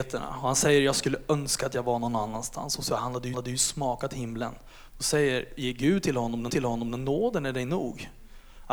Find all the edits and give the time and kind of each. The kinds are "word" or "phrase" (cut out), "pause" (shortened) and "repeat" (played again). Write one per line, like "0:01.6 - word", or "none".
0:03.3 - repeat
0:06.5 - repeat